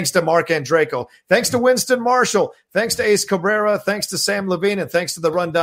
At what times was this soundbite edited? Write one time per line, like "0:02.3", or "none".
none

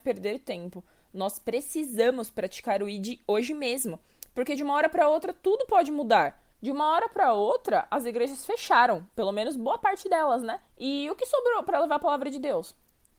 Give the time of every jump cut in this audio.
0:06.5
0:10.7

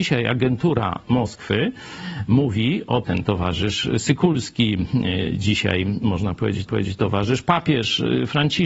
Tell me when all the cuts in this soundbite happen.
0:03.0
0:06.7

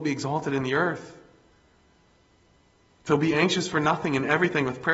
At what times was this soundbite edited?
none

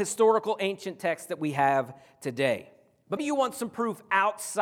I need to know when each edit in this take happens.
0:03.2

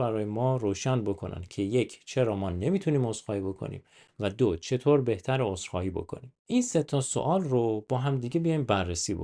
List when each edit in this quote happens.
0:06.4

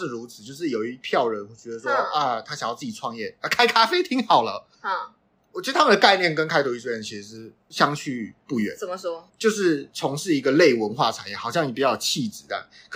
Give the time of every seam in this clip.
0:04.7
0:09.3

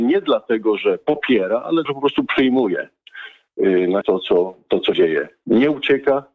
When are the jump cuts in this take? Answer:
0:01.9
0:04.0
0:04.9

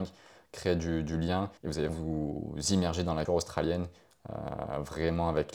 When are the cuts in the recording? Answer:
0:01.6
0:01.9
0:03.3

